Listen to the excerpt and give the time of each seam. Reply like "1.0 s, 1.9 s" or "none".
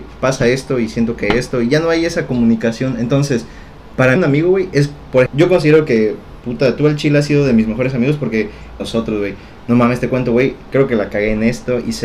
4.2 s, 5.3 s, 8.8 s